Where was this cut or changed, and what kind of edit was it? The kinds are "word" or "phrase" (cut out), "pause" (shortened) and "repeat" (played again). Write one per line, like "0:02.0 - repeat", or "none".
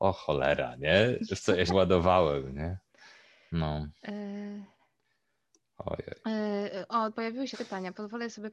0:01.7 - word
0:07.1 - word
0:07.5 - word